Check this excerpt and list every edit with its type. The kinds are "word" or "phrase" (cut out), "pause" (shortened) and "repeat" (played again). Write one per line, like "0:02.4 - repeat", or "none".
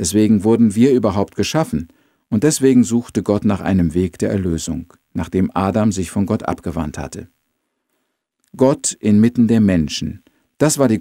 none